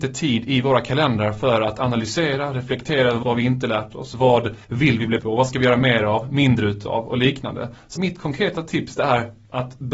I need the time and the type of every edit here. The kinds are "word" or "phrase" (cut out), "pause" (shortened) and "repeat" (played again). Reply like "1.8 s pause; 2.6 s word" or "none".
3.2 s phrase; 4.6 s pause; 5.2 s word; 8.0 s word